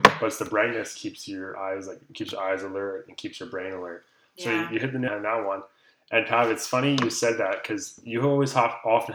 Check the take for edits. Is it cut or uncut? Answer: cut